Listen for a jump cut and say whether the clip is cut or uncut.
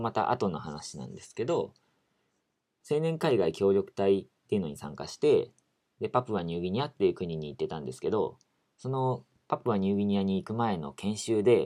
cut